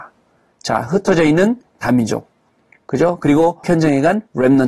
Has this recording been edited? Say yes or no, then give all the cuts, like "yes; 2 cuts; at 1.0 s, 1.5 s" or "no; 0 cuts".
yes; 1 cut; at 3.6 s